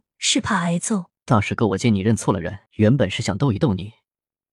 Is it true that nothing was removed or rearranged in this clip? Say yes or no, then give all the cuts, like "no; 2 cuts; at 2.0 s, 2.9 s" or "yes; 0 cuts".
no; 2 cuts; at 1.2 s, 2.7 s